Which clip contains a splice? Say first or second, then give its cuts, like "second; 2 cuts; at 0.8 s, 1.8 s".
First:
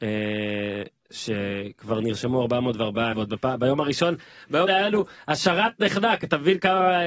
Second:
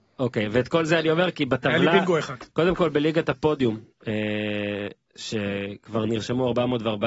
first; 2 cuts; at 3.1 s, 4.7 s